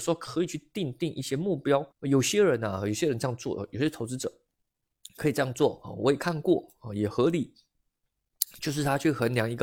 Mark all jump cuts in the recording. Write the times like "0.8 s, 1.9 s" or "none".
1.9 s